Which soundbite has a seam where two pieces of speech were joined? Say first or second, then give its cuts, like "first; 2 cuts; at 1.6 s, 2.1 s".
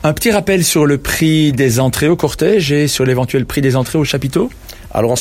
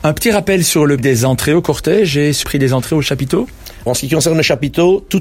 second; 3 cuts; at 1.0 s, 2.4 s, 3.9 s